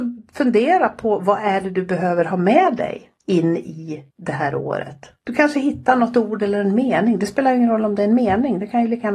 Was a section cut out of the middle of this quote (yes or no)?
yes